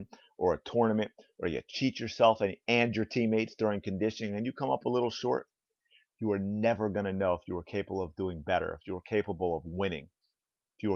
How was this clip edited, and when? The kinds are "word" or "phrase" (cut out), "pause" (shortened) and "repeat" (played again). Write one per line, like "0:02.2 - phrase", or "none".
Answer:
none